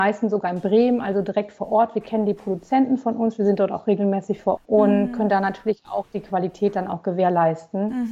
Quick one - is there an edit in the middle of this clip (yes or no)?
yes